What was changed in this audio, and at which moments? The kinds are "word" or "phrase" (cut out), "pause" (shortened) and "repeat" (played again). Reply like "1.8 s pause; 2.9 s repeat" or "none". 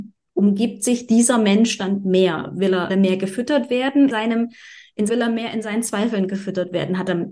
2.9 s word; 4.1 s word; 5.1 s phrase

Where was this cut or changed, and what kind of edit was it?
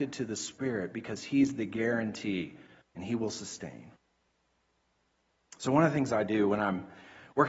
2.8 s pause

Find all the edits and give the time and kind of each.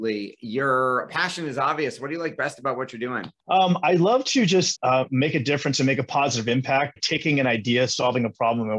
3.4 s pause; 4.7 s word; 7.0 s word

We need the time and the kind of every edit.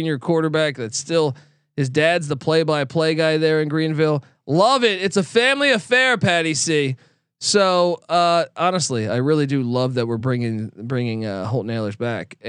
none

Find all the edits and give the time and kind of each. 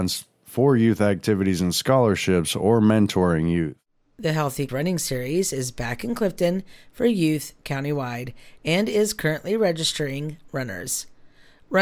4.7 s word

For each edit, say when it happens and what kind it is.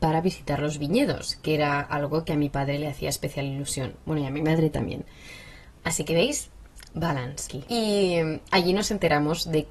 7.5 s word

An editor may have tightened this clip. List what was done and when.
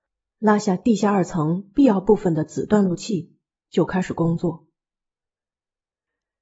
none

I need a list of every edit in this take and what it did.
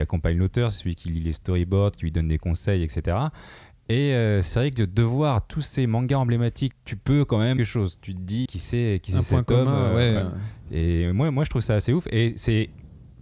6.7 s phrase; 7.6 s phrase; 8.5 s word

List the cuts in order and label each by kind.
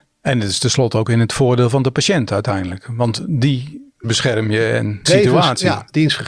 4.0 s word; 5.1 s word

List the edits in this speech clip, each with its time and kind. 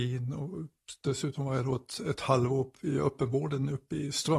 none

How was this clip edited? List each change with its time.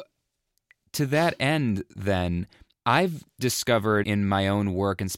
2.7 s pause; 4.0 s word

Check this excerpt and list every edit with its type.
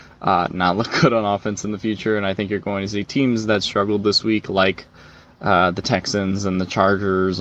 none

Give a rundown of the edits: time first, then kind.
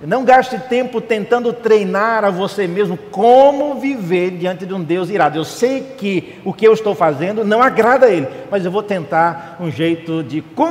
none

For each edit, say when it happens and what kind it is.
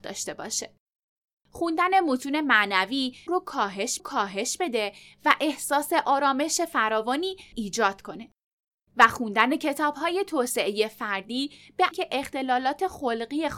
3.3 s phrase; 4.0 s repeat; 7.5 s word; 11.9 s word

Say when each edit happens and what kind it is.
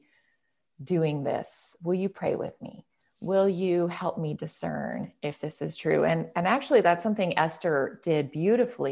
none

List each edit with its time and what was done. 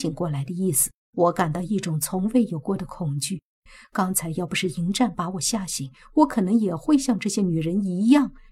1.0 s pause

